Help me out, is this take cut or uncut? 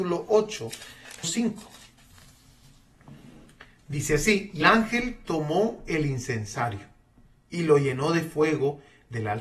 cut